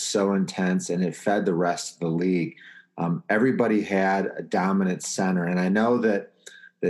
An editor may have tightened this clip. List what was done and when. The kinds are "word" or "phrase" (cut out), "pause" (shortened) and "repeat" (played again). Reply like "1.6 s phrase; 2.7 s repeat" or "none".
none